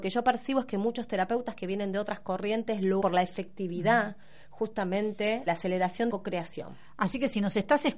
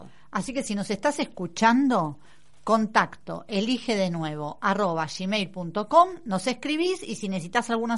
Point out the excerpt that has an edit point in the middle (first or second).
first